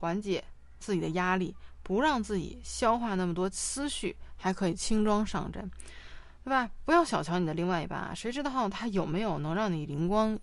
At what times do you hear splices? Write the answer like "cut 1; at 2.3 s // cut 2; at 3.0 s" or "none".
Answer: none